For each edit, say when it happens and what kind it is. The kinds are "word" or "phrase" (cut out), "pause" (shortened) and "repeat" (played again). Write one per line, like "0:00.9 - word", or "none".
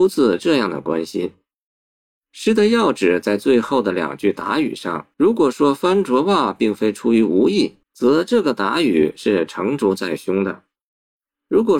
0:05.1 - pause
0:07.8 - pause

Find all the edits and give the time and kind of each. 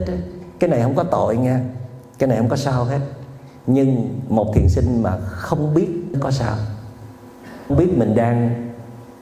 0:06.1 - word
0:07.7 - word

